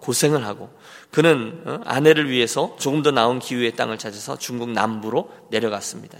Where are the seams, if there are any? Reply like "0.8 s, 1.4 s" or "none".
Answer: none